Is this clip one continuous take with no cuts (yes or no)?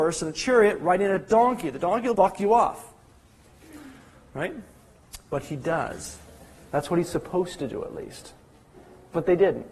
no